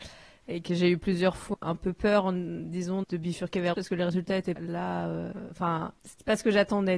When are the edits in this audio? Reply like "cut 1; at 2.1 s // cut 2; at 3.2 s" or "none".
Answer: cut 1; at 1.5 s // cut 2; at 3.0 s // cut 3; at 3.7 s // cut 4; at 4.6 s